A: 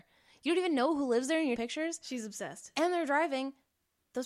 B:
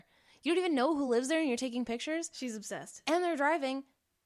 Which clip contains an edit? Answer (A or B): A